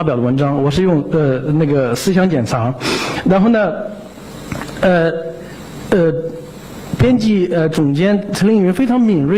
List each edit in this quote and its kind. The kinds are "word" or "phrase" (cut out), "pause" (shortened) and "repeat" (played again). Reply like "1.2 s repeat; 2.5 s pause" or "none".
none